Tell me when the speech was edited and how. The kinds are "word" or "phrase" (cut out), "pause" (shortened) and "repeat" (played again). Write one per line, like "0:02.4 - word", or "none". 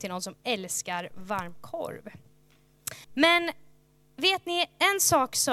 0:03.0 - pause